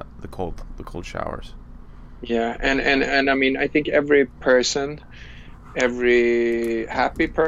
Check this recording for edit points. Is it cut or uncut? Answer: uncut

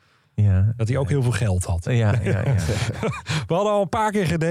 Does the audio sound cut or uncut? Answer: uncut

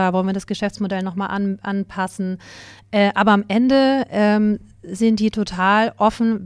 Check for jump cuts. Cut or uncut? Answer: uncut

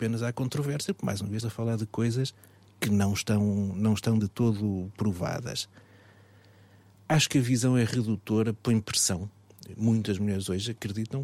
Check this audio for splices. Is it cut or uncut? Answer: cut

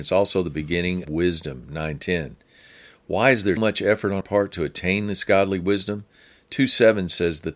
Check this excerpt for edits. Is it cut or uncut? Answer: cut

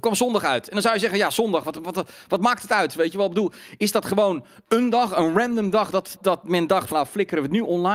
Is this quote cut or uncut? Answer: cut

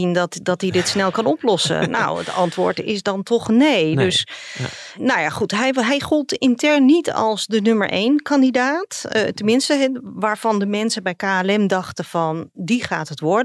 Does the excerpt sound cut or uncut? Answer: uncut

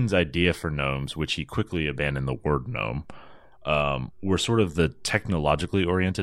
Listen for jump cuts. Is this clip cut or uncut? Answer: uncut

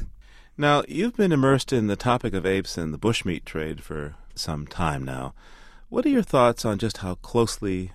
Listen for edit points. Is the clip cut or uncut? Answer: cut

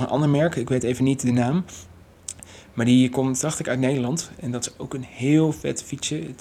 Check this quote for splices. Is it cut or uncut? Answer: uncut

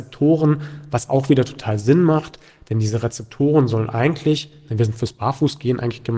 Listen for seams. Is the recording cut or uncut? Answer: uncut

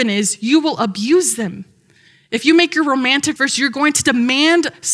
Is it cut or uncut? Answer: cut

